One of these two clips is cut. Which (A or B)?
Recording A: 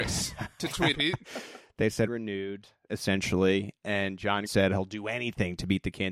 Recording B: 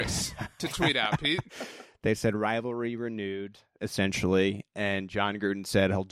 A